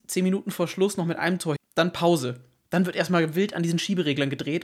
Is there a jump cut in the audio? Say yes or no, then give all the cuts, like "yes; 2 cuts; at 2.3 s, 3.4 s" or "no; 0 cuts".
yes; 1 cut; at 1.6 s